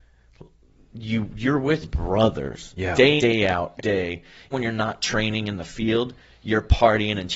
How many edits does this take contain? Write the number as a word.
four